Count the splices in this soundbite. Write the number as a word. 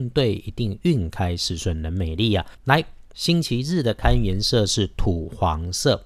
one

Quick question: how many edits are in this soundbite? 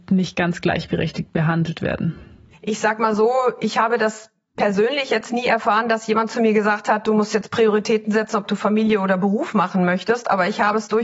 one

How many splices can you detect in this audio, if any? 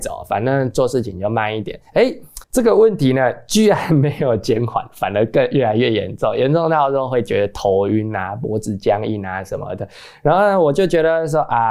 one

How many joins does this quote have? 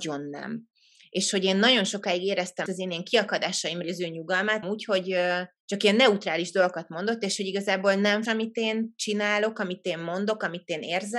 five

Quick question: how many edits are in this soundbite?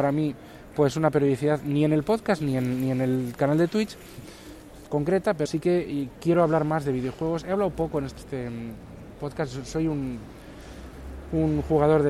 two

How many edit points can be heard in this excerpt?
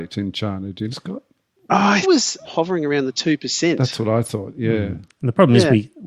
three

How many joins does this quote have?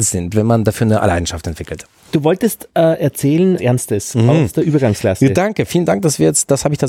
one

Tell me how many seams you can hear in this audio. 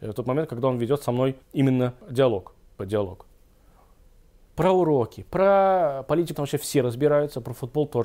four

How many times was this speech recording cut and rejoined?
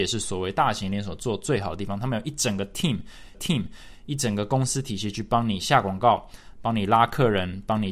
one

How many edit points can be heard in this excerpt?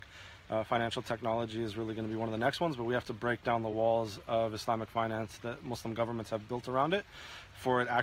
zero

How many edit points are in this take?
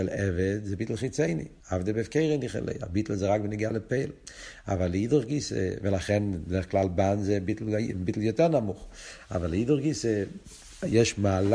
one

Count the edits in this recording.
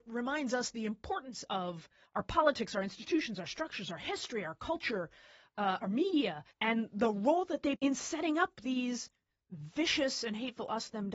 three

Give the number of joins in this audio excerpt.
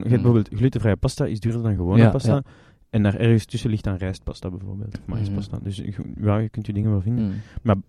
zero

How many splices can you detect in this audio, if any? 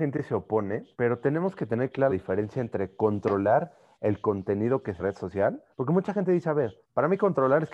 five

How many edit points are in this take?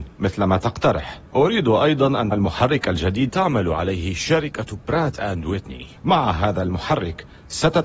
four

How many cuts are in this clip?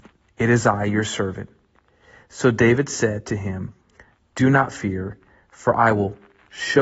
zero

